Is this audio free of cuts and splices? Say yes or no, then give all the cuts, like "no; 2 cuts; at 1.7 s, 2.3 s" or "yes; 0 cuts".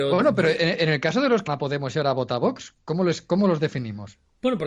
no; 1 cut; at 1.5 s